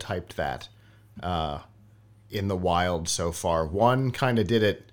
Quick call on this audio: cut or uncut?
uncut